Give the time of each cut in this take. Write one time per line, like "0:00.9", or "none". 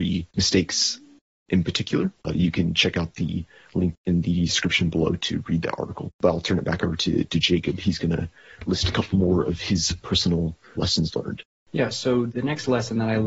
none